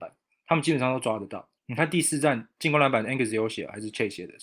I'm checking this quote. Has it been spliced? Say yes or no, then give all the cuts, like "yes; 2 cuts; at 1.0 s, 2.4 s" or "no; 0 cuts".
yes; 1 cut; at 1.6 s